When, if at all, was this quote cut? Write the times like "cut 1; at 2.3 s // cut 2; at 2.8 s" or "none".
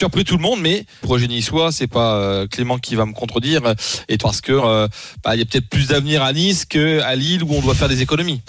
cut 1; at 1.0 s // cut 2; at 4.2 s // cut 3; at 4.6 s